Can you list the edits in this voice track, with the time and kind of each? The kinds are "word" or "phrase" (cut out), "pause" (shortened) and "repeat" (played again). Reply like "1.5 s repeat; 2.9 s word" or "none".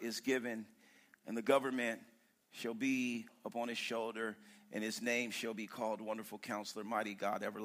none